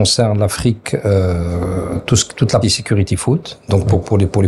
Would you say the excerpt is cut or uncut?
cut